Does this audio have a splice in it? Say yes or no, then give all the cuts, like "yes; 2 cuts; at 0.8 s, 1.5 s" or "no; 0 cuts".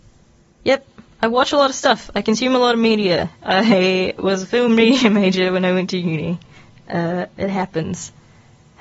no; 0 cuts